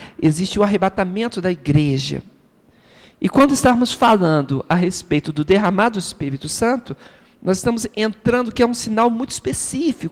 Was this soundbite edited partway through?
no; 0 cuts

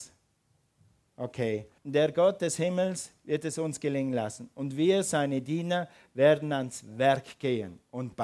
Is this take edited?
yes; 1 cut; at 1.8 s

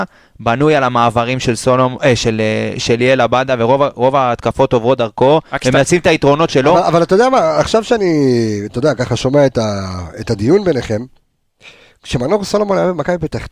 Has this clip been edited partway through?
no; 0 cuts

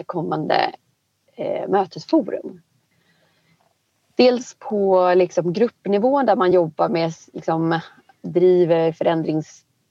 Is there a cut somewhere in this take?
no; 0 cuts

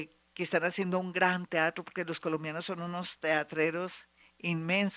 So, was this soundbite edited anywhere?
no; 0 cuts

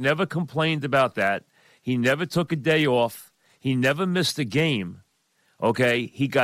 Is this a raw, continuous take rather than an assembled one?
yes; 0 cuts

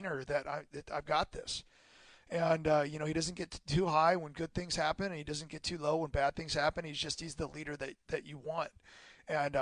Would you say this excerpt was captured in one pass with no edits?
yes; 0 cuts

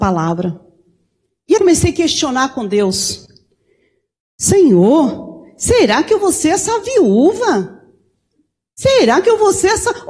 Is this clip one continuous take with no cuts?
no; 1 cut; at 1.6 s

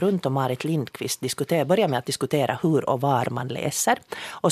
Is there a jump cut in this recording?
no; 0 cuts

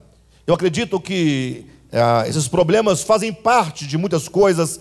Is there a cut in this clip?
no; 0 cuts

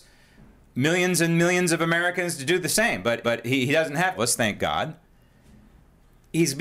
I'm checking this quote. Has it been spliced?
yes; 2 cuts; at 3.2 s, 4.1 s

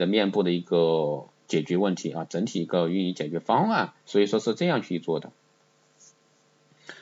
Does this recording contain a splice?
yes; 1 cut; at 4.0 s

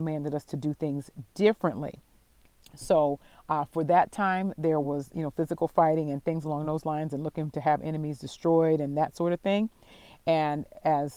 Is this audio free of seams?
yes; 0 cuts

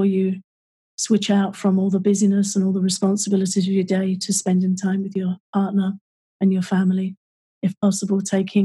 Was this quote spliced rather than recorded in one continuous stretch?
no; 0 cuts

